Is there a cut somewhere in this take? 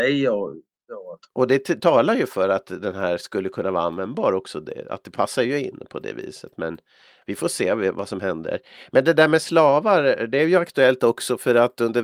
no; 0 cuts

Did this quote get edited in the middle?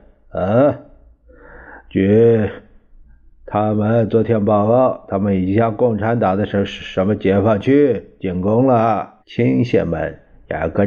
yes; 1 cut; at 9.2 s

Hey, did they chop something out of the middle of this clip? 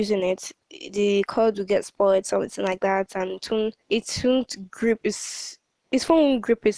yes; 1 cut; at 3.8 s

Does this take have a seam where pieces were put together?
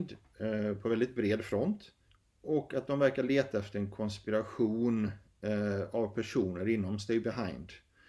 yes; 1 cut; at 2.1 s

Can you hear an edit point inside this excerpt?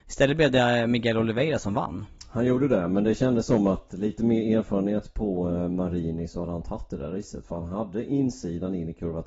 no; 0 cuts

